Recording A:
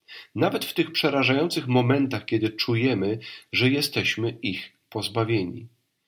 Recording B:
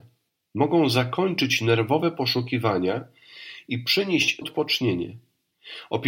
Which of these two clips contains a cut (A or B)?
B